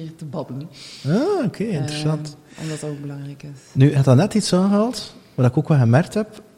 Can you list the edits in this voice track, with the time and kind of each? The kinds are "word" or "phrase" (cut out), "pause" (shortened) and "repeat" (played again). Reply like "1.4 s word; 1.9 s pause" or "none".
none

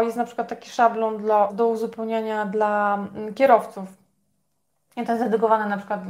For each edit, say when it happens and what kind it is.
1.5 s word

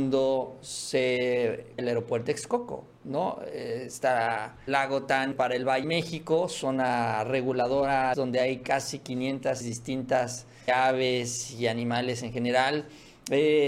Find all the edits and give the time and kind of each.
1.8 s word; 2.3 s word; 4.7 s word; 5.3 s word; 5.8 s word; 8.1 s word; 9.6 s word; 10.7 s word

